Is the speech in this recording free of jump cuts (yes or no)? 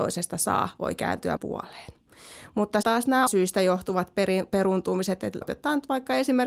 no